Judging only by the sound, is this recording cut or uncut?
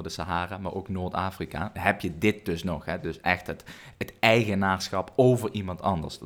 uncut